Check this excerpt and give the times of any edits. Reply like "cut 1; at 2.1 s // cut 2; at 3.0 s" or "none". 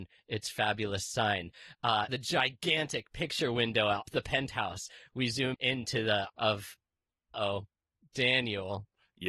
cut 1; at 2.1 s // cut 2; at 4.1 s // cut 3; at 5.5 s // cut 4; at 6.3 s // cut 5; at 7.3 s